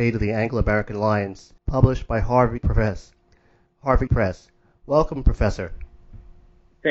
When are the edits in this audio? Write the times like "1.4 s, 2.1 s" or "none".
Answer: 1.6 s, 2.6 s, 4.1 s